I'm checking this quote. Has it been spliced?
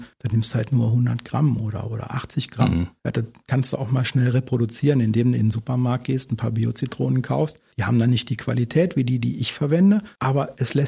no; 0 cuts

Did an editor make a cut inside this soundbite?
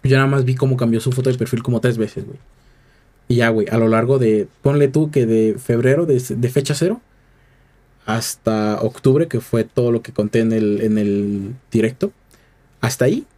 no; 0 cuts

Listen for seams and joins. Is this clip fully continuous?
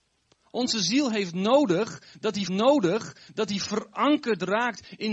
no; 1 cut; at 2.5 s

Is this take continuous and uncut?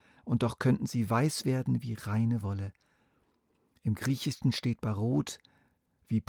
yes; 0 cuts

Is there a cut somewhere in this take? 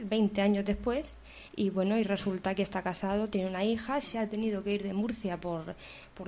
yes; 1 cut; at 1.5 s

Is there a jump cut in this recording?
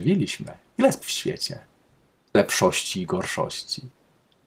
yes; 2 cuts; at 1.0 s, 2.3 s

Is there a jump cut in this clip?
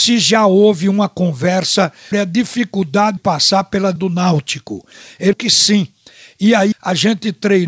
yes; 5 cuts; at 2.1 s, 3.2 s, 4.0 s, 5.3 s, 6.7 s

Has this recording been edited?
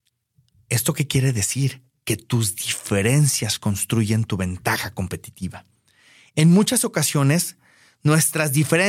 no; 0 cuts

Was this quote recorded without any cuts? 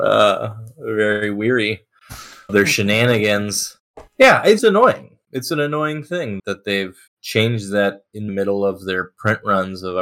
no; 6 cuts; at 2.5 s, 4.1 s, 4.6 s, 6.4 s, 7.1 s, 8.3 s

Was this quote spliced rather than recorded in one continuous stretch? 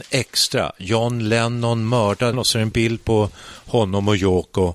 no; 0 cuts

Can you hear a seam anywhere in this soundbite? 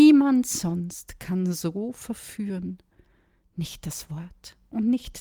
no; 0 cuts

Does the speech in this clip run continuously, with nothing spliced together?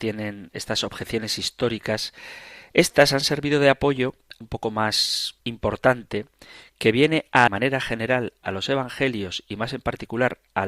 no; 3 cuts; at 4.4 s, 5.4 s, 7.5 s

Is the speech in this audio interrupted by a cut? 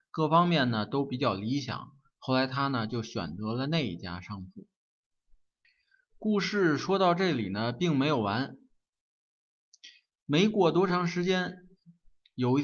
no; 0 cuts

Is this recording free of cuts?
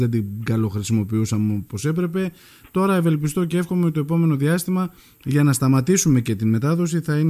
yes; 0 cuts

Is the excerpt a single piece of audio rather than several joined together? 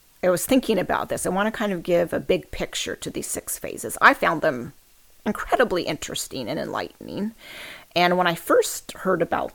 yes; 0 cuts

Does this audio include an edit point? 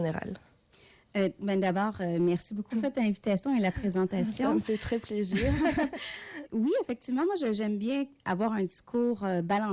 yes; 2 cuts; at 2.7 s, 6.4 s

